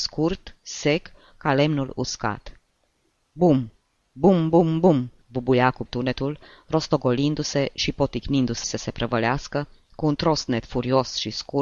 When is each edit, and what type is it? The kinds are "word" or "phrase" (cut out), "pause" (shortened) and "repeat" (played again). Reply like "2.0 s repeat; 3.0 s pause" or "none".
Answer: 5.2 s pause; 5.9 s word; 8.6 s phrase